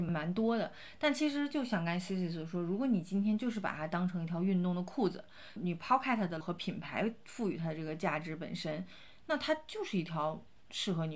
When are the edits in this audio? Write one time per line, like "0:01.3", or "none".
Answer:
0:06.4